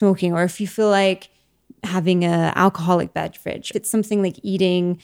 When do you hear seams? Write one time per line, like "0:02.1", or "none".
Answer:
0:03.7